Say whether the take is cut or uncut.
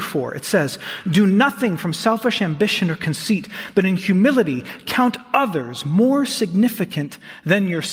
uncut